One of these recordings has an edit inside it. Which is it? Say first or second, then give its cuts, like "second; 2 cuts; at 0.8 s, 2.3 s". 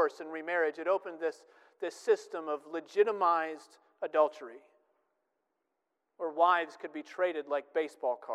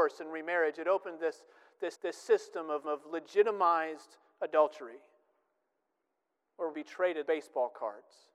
second; 4 cuts; at 1.9 s, 2.8 s, 6.7 s, 7.3 s